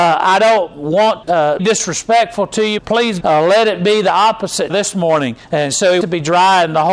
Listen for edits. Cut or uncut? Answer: cut